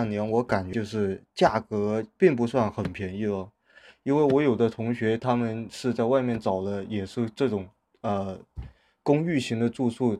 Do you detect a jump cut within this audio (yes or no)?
no